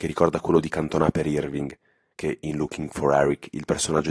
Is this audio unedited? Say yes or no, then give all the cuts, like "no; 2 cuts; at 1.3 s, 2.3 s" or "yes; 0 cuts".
yes; 0 cuts